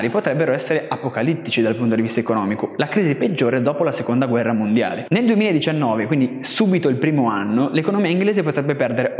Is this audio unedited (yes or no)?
yes